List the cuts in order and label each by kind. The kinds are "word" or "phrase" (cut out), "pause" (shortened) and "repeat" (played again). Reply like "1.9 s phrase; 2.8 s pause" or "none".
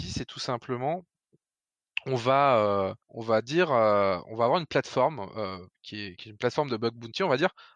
3.0 s pause

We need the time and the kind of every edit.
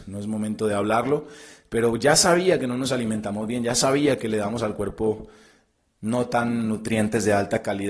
none

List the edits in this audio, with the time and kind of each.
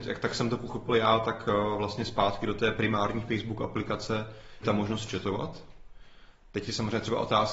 4.6 s word

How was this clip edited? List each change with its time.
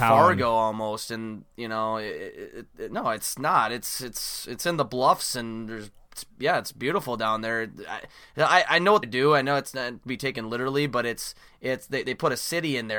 9.0 s phrase; 11.5 s pause

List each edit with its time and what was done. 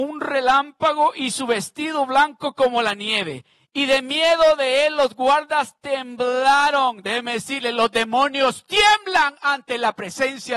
3.5 s pause

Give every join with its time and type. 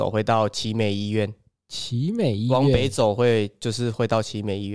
1.6 s pause

